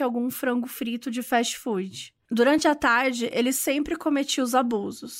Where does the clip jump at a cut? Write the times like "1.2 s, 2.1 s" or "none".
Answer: none